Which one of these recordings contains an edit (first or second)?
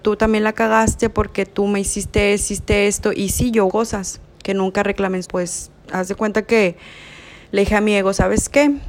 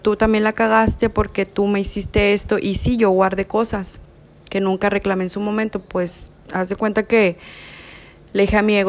first